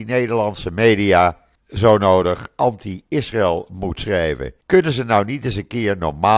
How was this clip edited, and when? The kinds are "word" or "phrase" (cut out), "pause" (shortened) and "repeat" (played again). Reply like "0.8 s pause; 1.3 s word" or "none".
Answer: 1.6 s word; 4.6 s pause